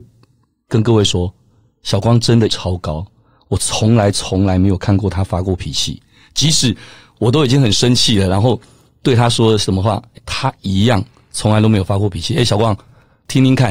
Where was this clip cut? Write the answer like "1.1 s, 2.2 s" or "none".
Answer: 2.5 s, 10.2 s